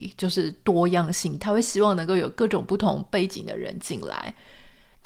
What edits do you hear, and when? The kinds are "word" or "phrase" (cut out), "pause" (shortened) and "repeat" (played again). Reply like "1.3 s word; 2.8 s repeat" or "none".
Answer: 1.4 s phrase